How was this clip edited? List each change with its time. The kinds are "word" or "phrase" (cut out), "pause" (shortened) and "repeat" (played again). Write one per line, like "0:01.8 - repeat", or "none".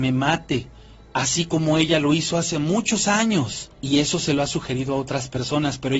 0:03.7 - pause